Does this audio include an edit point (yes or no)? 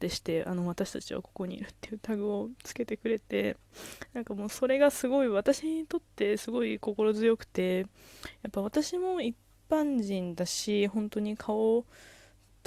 no